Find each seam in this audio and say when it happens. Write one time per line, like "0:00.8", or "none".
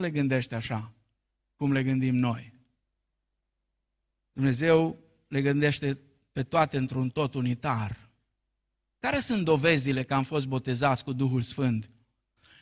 none